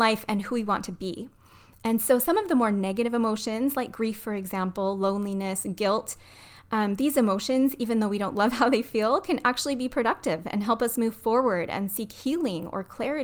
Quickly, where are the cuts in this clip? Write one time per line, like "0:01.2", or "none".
none

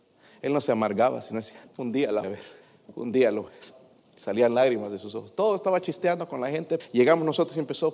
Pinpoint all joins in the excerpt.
0:01.6
0:02.2
0:02.6
0:03.5
0:06.8

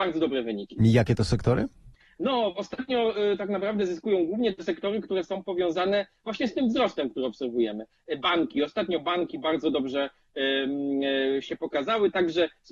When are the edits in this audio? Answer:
0:01.9

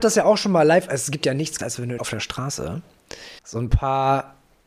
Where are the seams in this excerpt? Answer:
0:01.6
0:02.0
0:03.4

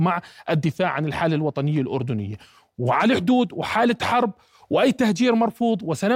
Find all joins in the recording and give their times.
none

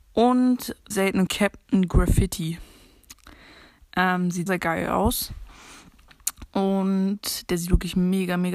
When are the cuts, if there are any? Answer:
0:00.9
0:01.3
0:04.5

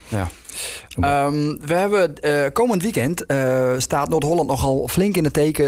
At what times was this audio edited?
none

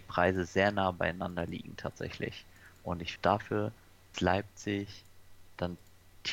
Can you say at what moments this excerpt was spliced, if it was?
0:03.2
0:04.1

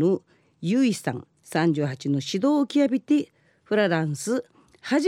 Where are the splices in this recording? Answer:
none

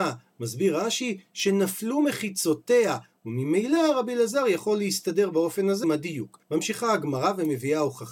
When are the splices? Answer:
0:05.8
0:06.4

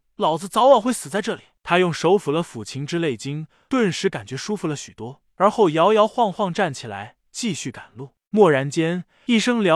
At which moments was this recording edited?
none

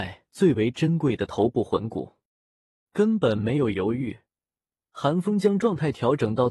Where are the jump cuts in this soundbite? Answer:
none

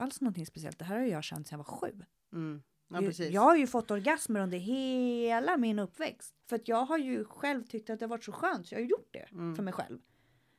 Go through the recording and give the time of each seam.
0:02.7
0:06.4

